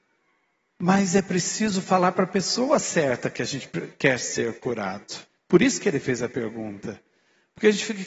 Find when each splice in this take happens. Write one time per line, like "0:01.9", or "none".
0:05.3